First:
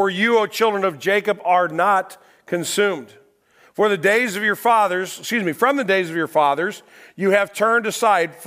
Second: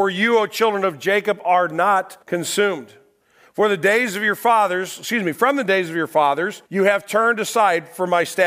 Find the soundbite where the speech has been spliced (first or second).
second